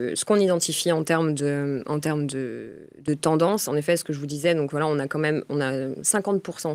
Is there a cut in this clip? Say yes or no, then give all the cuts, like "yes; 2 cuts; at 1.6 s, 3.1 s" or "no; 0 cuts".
no; 0 cuts